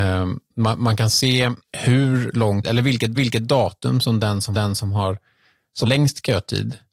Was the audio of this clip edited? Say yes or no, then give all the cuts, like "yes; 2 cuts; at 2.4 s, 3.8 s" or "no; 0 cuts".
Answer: yes; 5 cuts; at 1.6 s, 2.6 s, 3.2 s, 4.5 s, 5.9 s